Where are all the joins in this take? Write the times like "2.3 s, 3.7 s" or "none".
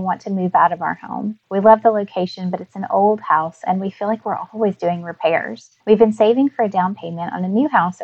1.4 s, 5.8 s